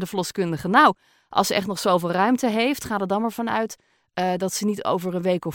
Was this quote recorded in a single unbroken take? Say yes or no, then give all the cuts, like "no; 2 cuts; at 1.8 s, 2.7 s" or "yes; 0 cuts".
yes; 0 cuts